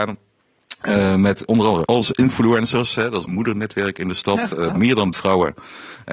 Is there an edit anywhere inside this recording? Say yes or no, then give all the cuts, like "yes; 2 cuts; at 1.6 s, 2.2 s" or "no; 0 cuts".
yes; 5 cuts; at 1.5 s, 1.9 s, 3.2 s, 4.7 s, 5.1 s